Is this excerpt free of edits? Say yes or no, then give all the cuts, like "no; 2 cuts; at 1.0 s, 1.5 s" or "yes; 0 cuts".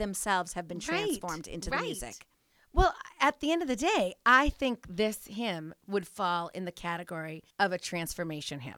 no; 1 cut; at 7.5 s